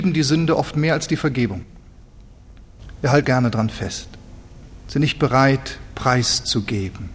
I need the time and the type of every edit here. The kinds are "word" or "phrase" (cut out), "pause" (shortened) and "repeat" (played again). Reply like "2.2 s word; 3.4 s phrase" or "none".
3.2 s word